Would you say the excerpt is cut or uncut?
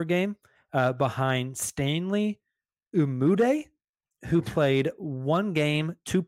uncut